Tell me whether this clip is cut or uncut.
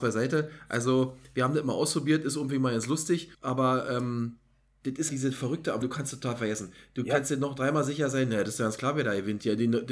cut